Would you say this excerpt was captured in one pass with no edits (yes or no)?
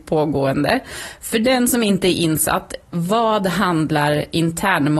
yes